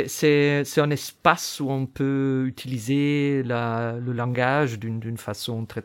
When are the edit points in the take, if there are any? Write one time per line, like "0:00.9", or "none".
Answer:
none